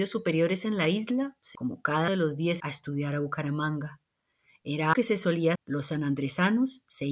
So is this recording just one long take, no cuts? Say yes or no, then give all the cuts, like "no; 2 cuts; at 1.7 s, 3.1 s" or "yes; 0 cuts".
no; 5 cuts; at 1.5 s, 2.1 s, 2.6 s, 4.9 s, 5.5 s